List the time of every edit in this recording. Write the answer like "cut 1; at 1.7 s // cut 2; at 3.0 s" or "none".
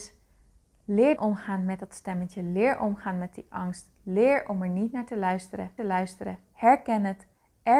cut 1; at 1.2 s // cut 2; at 5.8 s